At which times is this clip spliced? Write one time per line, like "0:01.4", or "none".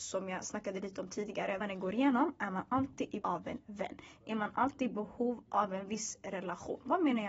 0:01.6
0:03.2